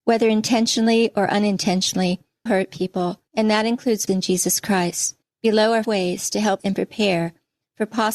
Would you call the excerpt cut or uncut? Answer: cut